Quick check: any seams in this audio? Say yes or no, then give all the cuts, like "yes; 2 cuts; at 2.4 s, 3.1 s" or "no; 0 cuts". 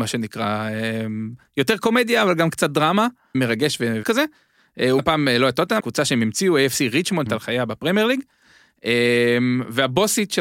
yes; 5 cuts; at 3.3 s, 4.0 s, 5.0 s, 5.8 s, 7.3 s